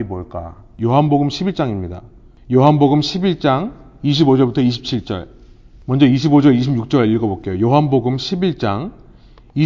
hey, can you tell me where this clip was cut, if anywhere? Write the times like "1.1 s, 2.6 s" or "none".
none